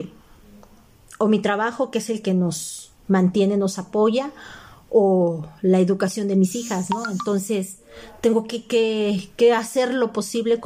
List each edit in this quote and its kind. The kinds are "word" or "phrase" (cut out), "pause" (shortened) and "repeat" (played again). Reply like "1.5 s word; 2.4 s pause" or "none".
none